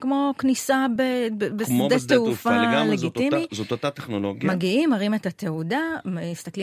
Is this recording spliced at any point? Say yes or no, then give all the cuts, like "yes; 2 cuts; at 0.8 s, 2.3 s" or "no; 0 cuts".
no; 0 cuts